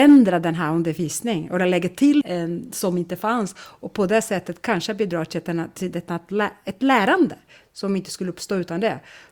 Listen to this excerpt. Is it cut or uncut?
cut